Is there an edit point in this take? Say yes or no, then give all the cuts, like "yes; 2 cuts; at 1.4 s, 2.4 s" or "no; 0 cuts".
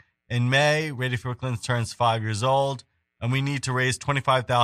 no; 0 cuts